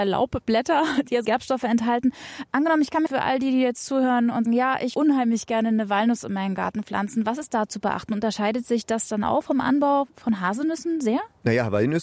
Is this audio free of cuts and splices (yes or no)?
no